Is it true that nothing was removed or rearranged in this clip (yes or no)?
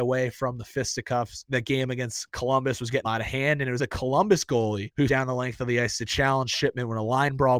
no